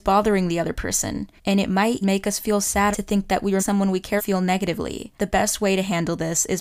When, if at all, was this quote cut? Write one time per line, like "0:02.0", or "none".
0:01.4
0:02.0
0:02.9
0:03.6
0:04.2
0:05.2